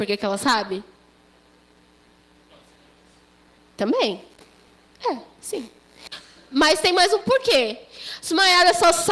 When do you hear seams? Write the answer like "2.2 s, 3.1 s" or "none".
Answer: none